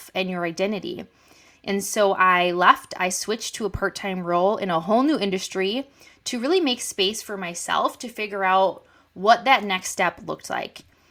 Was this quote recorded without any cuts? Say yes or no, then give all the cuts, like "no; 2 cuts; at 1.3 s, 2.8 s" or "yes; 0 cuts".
yes; 0 cuts